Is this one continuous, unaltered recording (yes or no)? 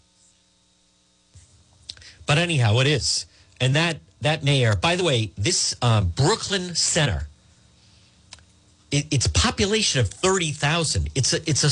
yes